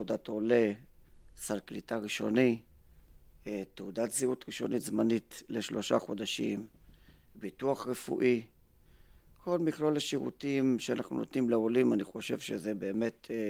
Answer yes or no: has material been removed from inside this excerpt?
no